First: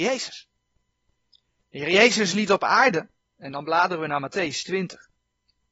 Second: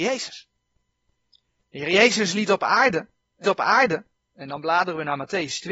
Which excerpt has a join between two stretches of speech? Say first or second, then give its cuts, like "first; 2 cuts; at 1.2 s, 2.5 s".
second; 1 cut; at 3.4 s